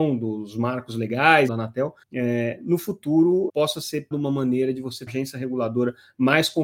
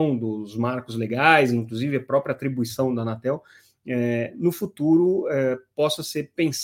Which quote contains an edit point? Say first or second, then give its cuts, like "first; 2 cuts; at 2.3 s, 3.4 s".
first; 5 cuts; at 1.5 s, 2.0 s, 3.5 s, 4.1 s, 5.1 s